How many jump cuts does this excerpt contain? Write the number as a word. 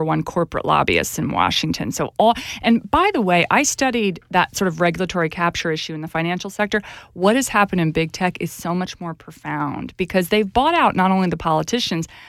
zero